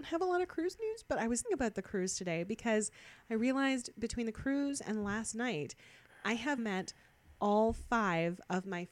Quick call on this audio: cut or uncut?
cut